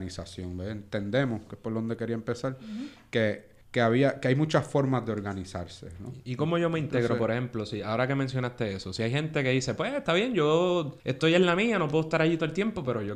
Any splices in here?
yes; 2 cuts; at 3.6 s, 11.0 s

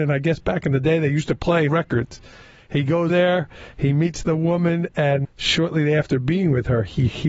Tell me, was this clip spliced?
yes; 3 cuts; at 1.7 s, 3.1 s, 5.2 s

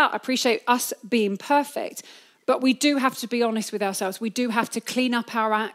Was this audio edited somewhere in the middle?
no; 0 cuts

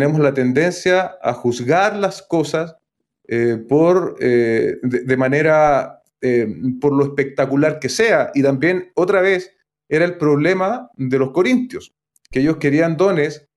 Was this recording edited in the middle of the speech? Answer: no; 0 cuts

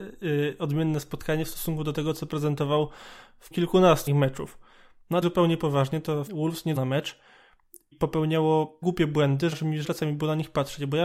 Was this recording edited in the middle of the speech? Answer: yes; 9 cuts; at 3.5 s, 4.1 s, 5.2 s, 6.3 s, 6.8 s, 7.9 s, 8.8 s, 9.5 s, 9.8 s

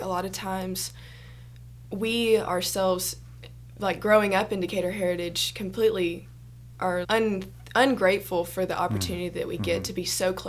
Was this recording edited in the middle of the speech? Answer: yes; 1 cut; at 7.0 s

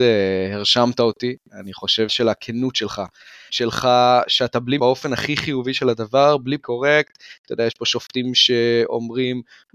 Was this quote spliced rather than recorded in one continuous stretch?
yes; 4 cuts; at 2.1 s, 3.5 s, 4.8 s, 6.6 s

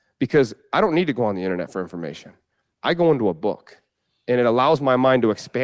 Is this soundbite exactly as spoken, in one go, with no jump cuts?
yes; 0 cuts

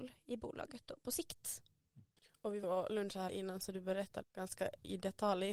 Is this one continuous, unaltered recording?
no; 3 cuts; at 2.6 s, 3.3 s, 4.2 s

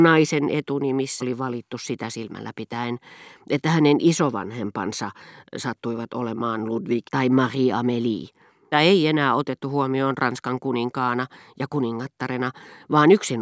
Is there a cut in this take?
yes; 3 cuts; at 1.2 s, 7.1 s, 8.7 s

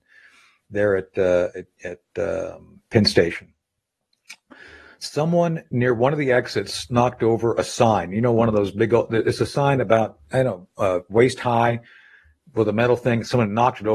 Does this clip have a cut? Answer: no; 0 cuts

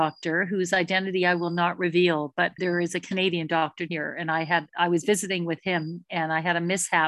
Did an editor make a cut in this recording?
yes; 2 cuts; at 2.6 s, 3.9 s

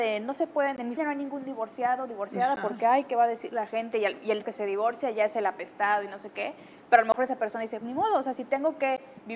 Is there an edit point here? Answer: yes; 3 cuts; at 1.0 s, 4.4 s, 7.8 s

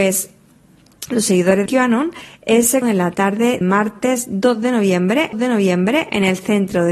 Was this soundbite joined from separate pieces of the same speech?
yes; 4 cuts; at 1.7 s, 2.8 s, 3.6 s, 5.3 s

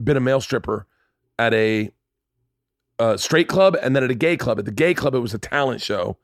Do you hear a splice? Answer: no; 0 cuts

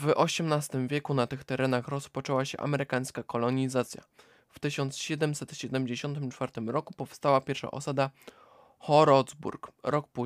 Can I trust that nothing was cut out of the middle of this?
yes; 0 cuts

